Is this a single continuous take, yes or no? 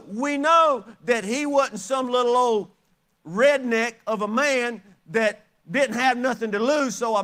yes